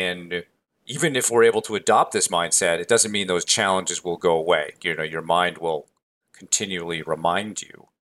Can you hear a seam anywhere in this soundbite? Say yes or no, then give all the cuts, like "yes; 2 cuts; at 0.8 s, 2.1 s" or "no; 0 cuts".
no; 0 cuts